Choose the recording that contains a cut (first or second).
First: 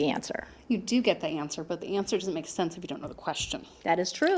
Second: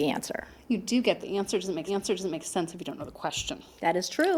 second